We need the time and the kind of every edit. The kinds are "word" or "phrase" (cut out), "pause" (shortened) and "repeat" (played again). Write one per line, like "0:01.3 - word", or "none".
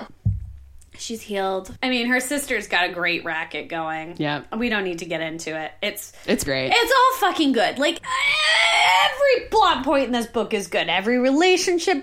0:06.4 - word